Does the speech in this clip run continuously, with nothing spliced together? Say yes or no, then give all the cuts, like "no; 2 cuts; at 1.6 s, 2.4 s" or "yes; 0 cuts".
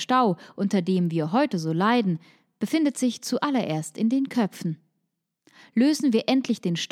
yes; 0 cuts